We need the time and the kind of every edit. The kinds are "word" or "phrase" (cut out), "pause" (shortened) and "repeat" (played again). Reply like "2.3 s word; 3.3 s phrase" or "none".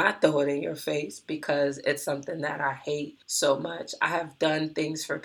3.2 s pause